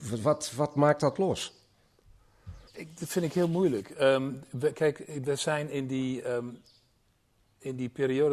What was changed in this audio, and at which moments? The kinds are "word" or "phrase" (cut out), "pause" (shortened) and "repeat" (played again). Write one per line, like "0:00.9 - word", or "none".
0:02.7 - pause